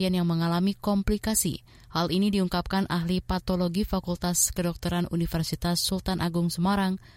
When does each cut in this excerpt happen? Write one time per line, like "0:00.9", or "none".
none